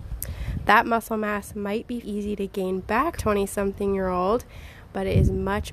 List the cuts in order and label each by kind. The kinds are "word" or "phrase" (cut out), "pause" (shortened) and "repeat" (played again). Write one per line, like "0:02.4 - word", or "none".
0:02.0 - word
0:03.2 - phrase